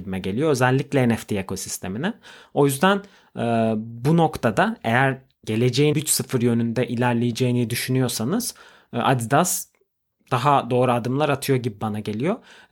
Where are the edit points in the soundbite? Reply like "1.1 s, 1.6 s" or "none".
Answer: 5.9 s